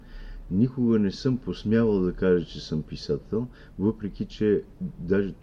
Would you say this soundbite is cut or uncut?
uncut